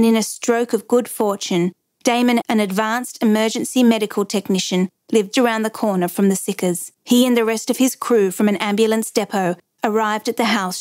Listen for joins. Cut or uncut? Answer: cut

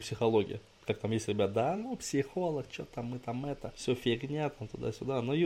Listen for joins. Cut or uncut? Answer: uncut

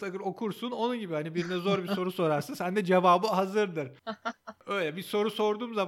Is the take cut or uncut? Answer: uncut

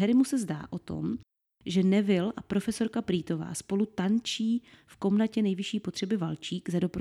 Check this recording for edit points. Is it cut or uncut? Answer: uncut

